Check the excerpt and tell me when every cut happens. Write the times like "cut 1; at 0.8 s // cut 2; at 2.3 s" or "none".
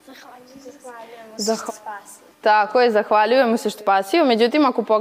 cut 1; at 1.7 s // cut 2; at 2.3 s // cut 3; at 3.8 s